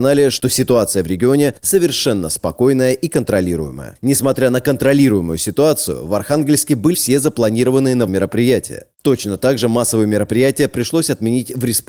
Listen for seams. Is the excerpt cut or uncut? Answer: cut